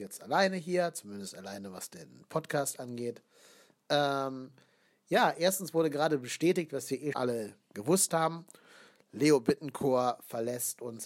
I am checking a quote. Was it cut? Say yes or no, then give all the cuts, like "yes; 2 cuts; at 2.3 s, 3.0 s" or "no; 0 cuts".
yes; 1 cut; at 7.1 s